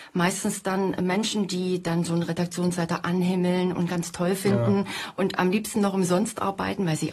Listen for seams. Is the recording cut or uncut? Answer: uncut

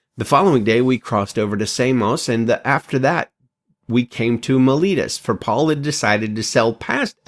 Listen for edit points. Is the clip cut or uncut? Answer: uncut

